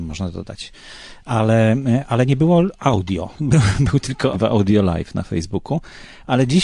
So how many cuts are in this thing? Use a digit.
1